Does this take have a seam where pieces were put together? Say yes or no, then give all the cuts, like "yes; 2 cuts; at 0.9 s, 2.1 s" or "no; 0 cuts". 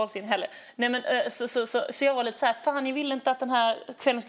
no; 0 cuts